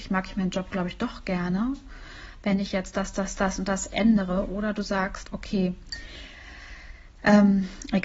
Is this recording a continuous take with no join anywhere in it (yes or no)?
yes